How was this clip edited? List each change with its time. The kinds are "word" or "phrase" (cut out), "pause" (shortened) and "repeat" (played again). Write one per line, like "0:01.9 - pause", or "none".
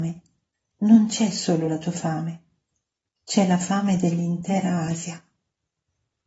none